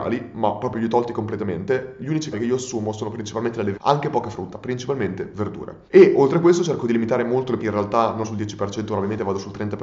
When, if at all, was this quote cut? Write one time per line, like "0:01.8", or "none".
0:02.3
0:03.7
0:05.9
0:07.6
0:08.2